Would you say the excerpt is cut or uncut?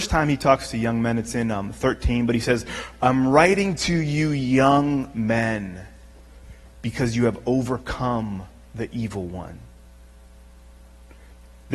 uncut